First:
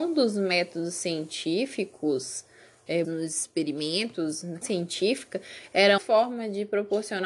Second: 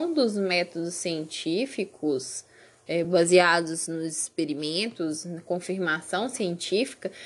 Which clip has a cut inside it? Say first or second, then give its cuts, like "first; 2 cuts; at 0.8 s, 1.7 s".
first; 3 cuts; at 3.0 s, 4.6 s, 6.0 s